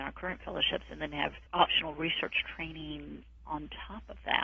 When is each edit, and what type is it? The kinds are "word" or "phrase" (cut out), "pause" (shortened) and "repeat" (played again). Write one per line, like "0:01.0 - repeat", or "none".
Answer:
0:01.5 - pause